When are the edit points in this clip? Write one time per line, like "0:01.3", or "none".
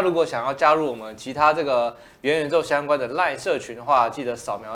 none

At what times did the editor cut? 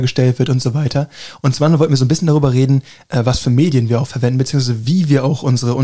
none

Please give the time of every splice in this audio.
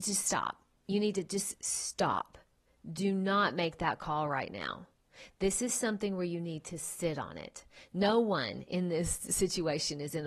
none

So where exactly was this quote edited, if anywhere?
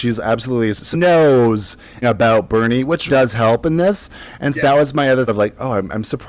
0:00.9
0:02.0
0:03.1
0:04.5
0:05.3

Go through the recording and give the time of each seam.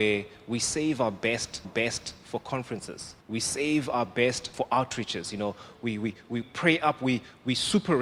0:01.6
0:03.2
0:04.5
0:06.4

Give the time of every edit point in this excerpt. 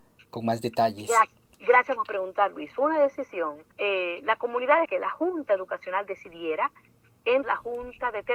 0:01.4
0:03.7
0:04.8
0:07.4

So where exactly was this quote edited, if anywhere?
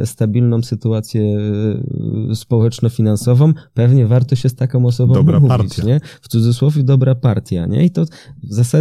none

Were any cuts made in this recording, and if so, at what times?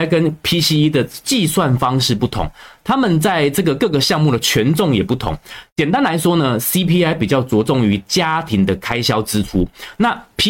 none

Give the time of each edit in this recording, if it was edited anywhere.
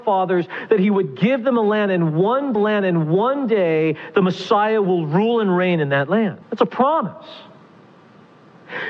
0:02.6
0:06.4

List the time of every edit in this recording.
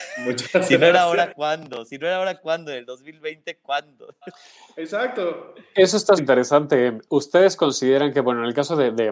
0:06.2

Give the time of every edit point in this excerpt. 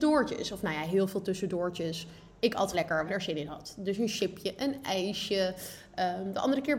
0:02.7
0:03.1

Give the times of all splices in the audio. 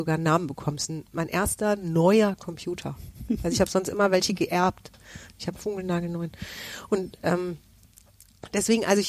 0:05.5

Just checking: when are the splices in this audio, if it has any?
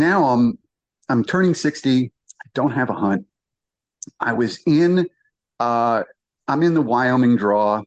none

